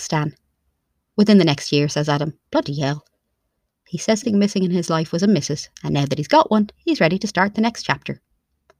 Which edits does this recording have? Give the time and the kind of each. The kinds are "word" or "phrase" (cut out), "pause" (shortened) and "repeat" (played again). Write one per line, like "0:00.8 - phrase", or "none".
0:02.5 - pause
0:04.2 - phrase
0:05.7 - pause